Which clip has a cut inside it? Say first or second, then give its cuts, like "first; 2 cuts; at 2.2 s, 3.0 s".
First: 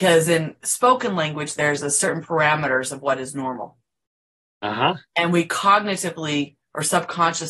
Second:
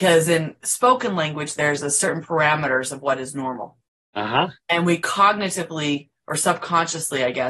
second; 1 cut; at 3.9 s